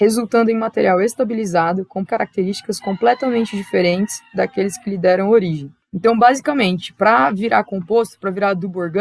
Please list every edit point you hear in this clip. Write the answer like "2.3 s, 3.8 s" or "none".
2.1 s, 5.8 s